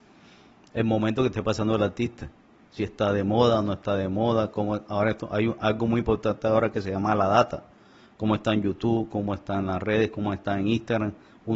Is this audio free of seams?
yes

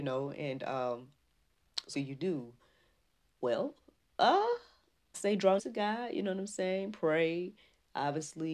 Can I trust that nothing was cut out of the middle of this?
no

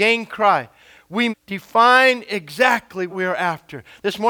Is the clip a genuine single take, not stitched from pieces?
no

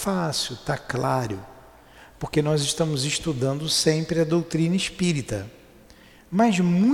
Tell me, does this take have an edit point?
no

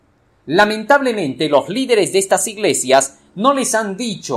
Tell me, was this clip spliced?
no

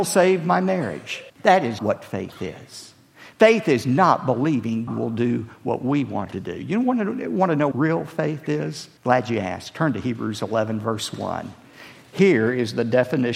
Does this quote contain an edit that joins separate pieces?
yes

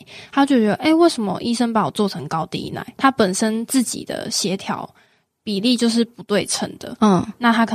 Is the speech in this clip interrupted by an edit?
no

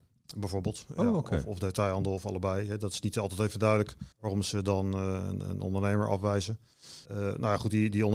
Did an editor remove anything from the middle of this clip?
yes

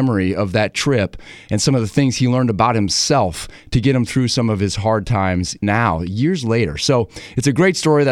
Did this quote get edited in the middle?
yes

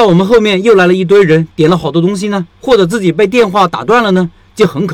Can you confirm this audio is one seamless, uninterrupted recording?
no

